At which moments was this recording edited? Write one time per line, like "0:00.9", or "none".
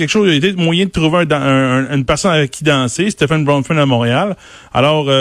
none

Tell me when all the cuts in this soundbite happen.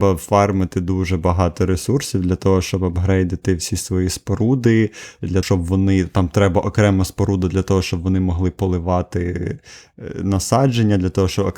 0:05.4

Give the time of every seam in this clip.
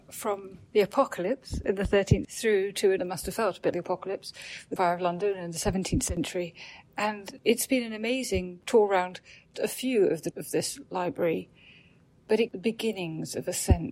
0:02.2
0:03.0
0:03.7
0:04.8
0:07.4
0:09.5
0:10.3
0:12.5

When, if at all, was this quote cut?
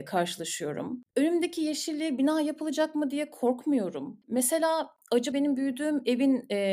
0:05.3

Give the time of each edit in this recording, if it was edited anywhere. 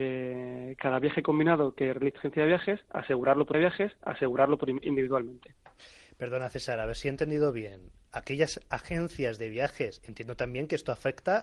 0:02.2
0:03.5

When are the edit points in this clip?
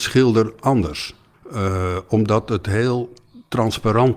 0:01.3

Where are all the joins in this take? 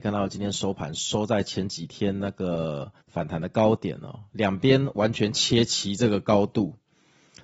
0:03.0

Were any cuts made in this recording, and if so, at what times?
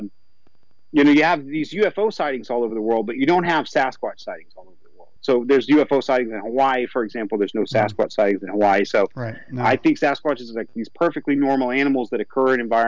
none

